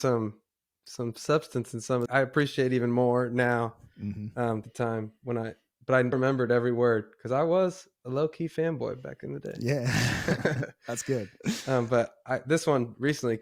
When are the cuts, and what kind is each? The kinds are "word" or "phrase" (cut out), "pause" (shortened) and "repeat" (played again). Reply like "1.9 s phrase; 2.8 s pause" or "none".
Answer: 2.1 s phrase; 4.6 s phrase; 6.1 s word

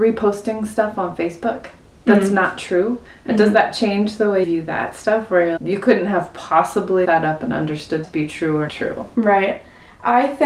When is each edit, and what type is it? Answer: 4.4 s word; 5.6 s word; 7.0 s word; 8.0 s word; 8.7 s word

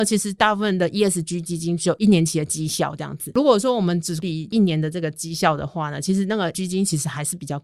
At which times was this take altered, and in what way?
6.5 s word

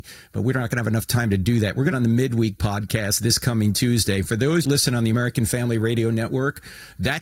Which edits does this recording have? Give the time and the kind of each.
1.9 s phrase; 4.6 s phrase

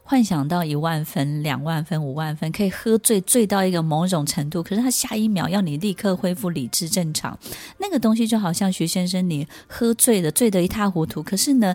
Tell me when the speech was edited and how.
none

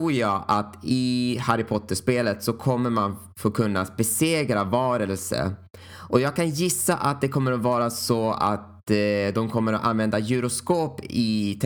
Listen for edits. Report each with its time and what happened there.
none

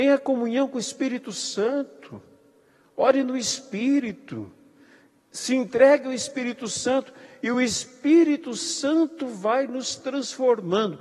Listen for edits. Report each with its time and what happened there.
none

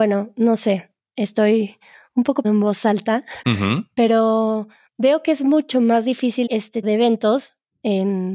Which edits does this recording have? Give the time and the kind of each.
2.4 s word; 3.4 s word; 6.5 s word; 6.8 s word

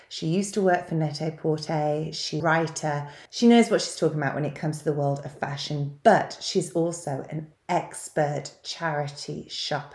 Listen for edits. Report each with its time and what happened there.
2.4 s phrase; 3.3 s pause

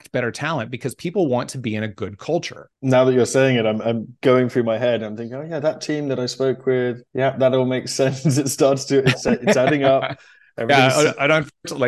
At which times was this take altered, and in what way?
2.7 s pause; 7.1 s pause

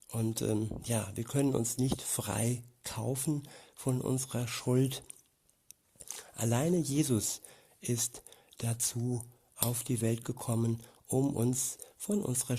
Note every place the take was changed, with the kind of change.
none

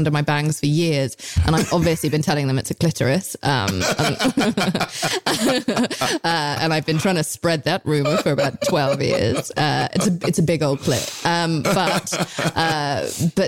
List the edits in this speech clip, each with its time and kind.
none

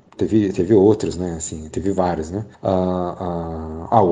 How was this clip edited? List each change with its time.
1.7 s word; 2.5 s pause

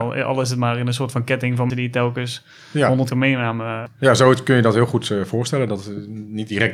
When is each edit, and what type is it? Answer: 1.7 s word; 3.1 s word

